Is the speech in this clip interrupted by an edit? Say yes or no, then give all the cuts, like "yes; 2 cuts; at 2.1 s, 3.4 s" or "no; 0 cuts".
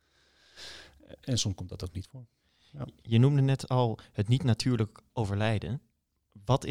no; 0 cuts